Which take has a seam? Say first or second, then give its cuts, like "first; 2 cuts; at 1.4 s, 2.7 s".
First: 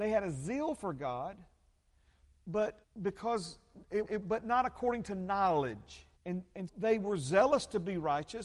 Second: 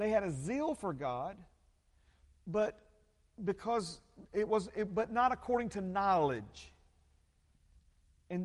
first; 4 cuts; at 2.8 s, 4.0 s, 6.2 s, 6.7 s